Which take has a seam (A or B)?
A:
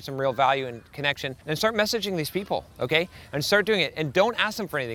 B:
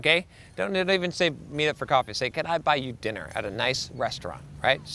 A